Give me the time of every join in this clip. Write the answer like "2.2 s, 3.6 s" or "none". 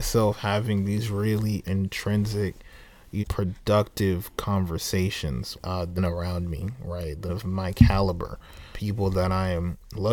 1.6 s, 3.2 s, 5.5 s, 6.0 s, 7.3 s, 8.7 s